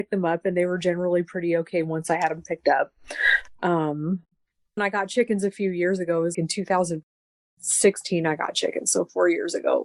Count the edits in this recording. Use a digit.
2